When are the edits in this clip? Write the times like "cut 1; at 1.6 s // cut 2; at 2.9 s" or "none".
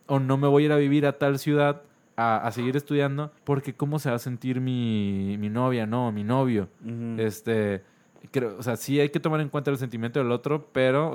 cut 1; at 3.4 s